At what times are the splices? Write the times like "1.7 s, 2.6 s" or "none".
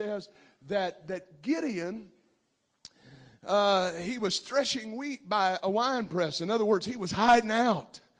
none